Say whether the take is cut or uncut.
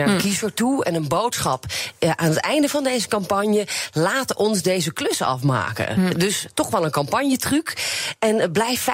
uncut